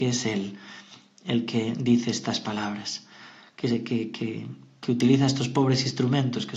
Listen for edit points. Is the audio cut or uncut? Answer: uncut